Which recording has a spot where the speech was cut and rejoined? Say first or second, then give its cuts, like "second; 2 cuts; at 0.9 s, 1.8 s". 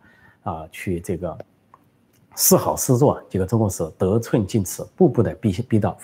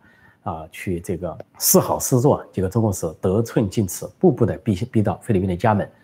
second; 1 cut; at 1.5 s